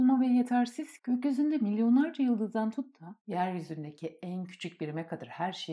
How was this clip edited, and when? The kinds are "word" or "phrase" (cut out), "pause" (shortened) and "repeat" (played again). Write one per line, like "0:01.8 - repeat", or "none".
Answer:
0:01.0 - word